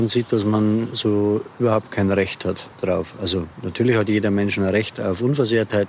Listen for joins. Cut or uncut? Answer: cut